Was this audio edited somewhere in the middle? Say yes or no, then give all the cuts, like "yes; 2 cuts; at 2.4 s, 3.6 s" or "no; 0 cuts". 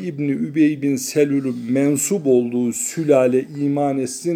no; 0 cuts